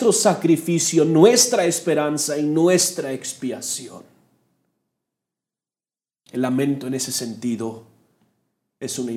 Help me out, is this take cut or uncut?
uncut